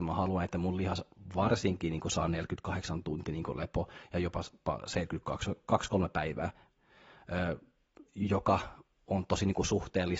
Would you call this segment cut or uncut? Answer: cut